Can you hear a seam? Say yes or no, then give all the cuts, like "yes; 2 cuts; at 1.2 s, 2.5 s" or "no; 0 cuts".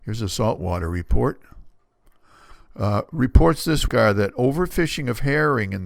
yes; 1 cut; at 3.9 s